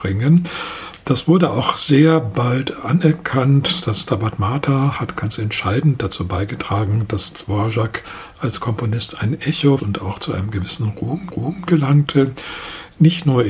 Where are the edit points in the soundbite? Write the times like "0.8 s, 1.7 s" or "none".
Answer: 9.8 s, 11.3 s